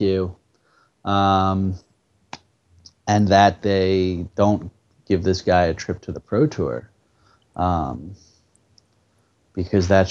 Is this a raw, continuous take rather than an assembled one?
yes; 0 cuts

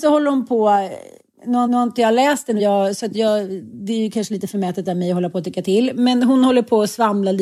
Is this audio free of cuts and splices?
no; 2 cuts; at 1.7 s, 2.6 s

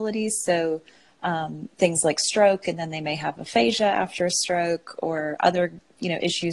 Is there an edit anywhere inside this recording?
no; 0 cuts

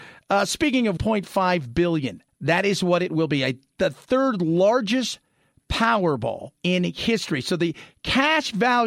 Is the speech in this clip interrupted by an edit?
yes; 3 cuts; at 1.0 s, 2.3 s, 6.6 s

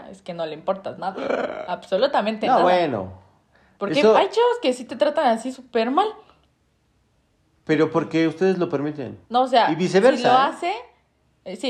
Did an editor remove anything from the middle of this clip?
yes; 1 cut; at 9.2 s

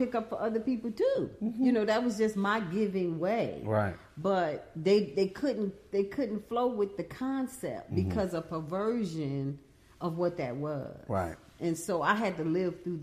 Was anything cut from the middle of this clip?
no; 0 cuts

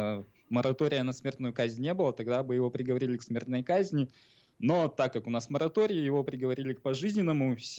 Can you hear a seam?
no; 0 cuts

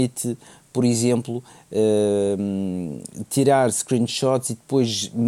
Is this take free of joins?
yes; 0 cuts

